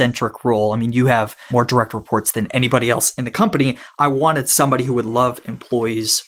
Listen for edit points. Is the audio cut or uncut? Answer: uncut